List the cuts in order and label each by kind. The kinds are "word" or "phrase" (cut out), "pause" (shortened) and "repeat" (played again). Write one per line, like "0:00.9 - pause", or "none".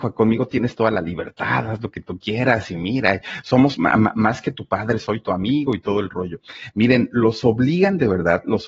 none